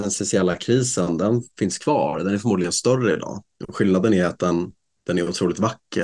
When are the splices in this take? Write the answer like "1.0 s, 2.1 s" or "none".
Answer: none